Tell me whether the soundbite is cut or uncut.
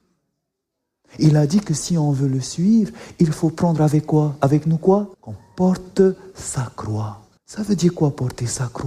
cut